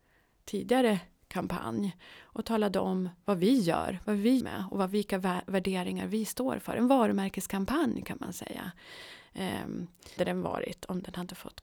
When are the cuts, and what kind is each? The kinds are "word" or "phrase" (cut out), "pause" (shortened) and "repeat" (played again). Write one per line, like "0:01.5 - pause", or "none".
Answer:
0:04.4 - word
0:10.2 - word